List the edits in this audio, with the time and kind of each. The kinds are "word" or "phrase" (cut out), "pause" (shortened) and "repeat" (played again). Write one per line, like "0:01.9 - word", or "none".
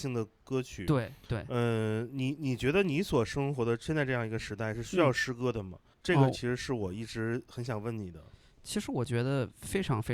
0:05.9 - pause